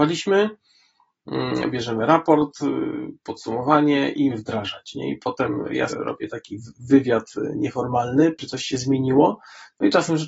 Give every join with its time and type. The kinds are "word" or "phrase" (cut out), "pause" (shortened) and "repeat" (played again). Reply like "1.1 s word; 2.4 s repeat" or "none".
1.7 s word; 4.3 s phrase; 5.9 s word; 8.4 s word